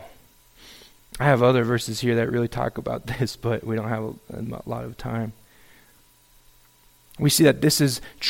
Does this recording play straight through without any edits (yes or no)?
yes